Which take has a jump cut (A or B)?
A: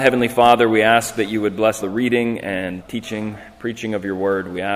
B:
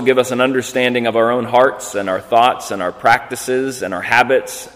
A